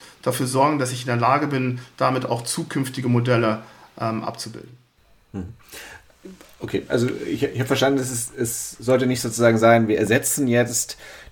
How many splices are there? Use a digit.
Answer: 0